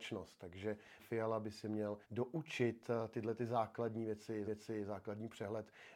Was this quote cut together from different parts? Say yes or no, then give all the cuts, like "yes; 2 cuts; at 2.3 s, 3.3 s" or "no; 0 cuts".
yes; 3 cuts; at 1.0 s, 2.0 s, 4.5 s